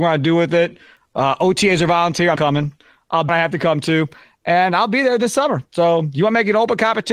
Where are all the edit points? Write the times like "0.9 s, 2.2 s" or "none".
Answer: 2.4 s, 3.3 s, 5.7 s